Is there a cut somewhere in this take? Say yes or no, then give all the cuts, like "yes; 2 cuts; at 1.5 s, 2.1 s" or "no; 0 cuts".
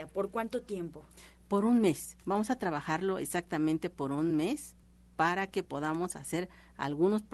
no; 0 cuts